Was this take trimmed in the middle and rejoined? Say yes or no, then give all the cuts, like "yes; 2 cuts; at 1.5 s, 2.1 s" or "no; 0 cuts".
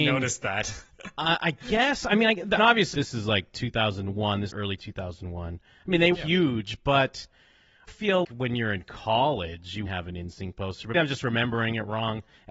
yes; 8 cuts; at 2.6 s, 2.9 s, 4.5 s, 6.1 s, 7.9 s, 8.2 s, 9.9 s, 10.9 s